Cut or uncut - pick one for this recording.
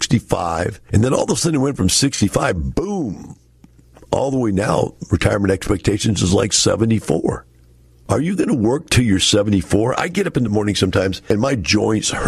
uncut